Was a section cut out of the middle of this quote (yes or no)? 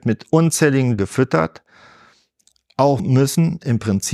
yes